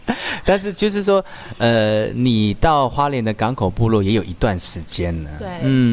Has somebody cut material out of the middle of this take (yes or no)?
no